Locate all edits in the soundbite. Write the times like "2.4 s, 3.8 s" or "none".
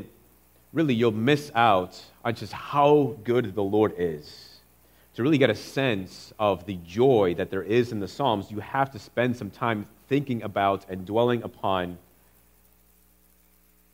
none